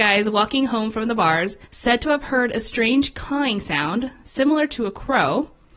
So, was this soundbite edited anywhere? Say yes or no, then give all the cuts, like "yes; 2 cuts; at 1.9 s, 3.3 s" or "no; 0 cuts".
yes; 1 cut; at 1.7 s